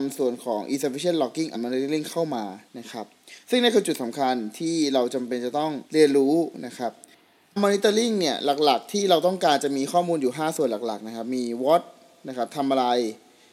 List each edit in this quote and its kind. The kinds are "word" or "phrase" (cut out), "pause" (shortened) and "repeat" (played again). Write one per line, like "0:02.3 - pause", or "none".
0:01.5 - word
0:02.7 - pause
0:05.9 - pause
0:07.6 - phrase